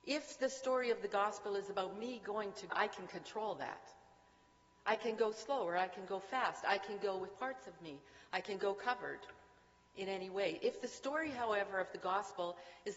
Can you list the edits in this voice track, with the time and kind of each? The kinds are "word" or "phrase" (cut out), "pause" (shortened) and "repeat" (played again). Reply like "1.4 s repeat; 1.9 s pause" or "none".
2.7 s word